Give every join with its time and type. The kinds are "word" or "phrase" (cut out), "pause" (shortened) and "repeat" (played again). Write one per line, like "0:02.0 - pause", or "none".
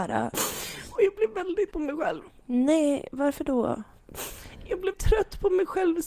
0:01.7 - word
0:04.9 - word